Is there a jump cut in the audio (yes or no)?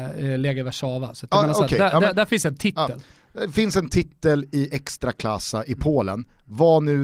no